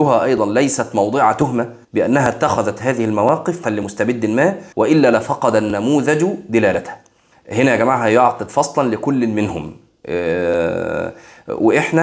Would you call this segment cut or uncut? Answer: cut